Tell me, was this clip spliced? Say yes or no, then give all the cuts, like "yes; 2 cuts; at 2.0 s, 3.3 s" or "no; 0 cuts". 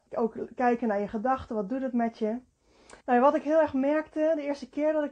yes; 1 cut; at 3.0 s